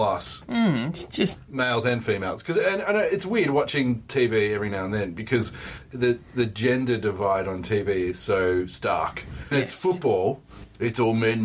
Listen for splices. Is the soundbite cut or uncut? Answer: cut